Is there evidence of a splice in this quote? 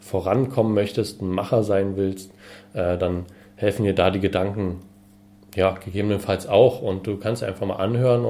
no; 0 cuts

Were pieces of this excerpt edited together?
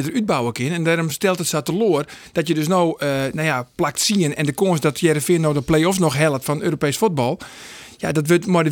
no; 0 cuts

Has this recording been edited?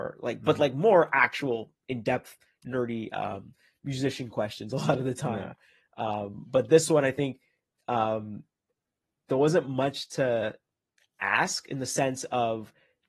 no; 0 cuts

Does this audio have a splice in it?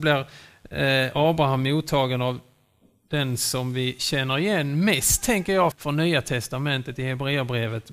yes; 1 cut; at 5.7 s

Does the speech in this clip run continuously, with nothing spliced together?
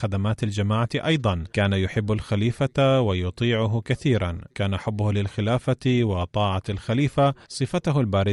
no; 3 cuts; at 1.5 s, 4.5 s, 7.4 s

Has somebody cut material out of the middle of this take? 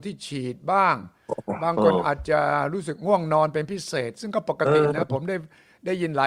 no; 0 cuts

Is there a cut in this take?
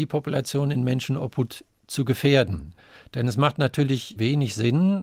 no; 0 cuts

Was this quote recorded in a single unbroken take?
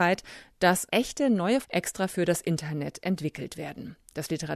no; 1 cut; at 1.6 s

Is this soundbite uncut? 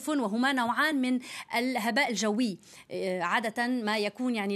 yes; 0 cuts

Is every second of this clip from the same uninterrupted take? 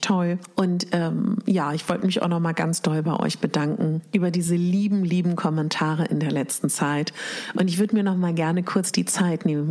yes; 0 cuts

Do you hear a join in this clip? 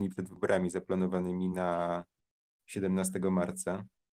no; 0 cuts

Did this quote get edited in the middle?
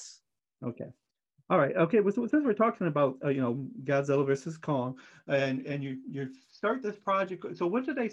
no; 0 cuts

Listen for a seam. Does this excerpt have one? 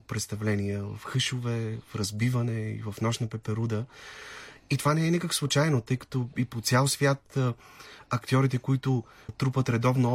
no; 0 cuts

